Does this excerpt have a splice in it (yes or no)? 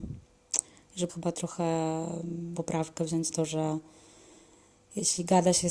yes